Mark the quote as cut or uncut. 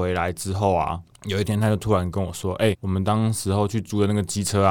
cut